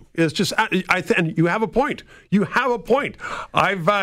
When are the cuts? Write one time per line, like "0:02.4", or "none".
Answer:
none